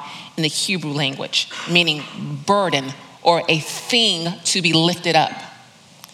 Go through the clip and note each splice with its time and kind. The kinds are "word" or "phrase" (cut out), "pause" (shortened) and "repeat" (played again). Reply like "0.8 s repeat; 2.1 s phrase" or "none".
none